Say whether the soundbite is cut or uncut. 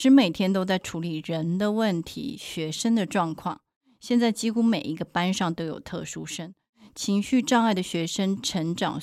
uncut